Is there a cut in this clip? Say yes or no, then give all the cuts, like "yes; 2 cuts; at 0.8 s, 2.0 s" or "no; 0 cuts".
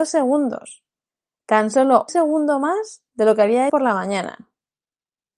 yes; 2 cuts; at 2.1 s, 3.7 s